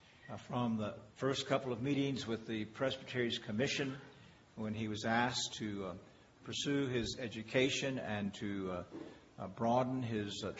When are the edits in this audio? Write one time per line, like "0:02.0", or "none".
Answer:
0:01.1